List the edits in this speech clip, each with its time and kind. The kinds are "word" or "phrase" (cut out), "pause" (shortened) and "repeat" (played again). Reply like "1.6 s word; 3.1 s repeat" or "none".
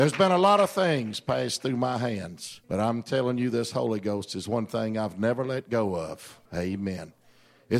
2.6 s pause; 6.4 s pause